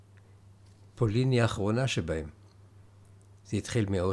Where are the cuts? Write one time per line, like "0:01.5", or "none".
none